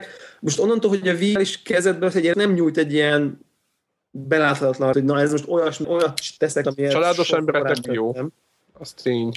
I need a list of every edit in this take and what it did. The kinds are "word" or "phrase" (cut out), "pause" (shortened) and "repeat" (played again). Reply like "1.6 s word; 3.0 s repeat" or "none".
1.4 s word; 2.3 s word; 4.9 s word; 5.8 s word; 6.6 s word; 7.9 s word